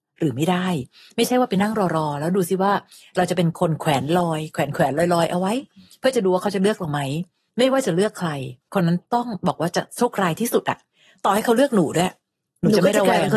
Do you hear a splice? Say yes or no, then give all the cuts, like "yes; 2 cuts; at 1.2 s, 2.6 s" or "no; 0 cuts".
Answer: no; 0 cuts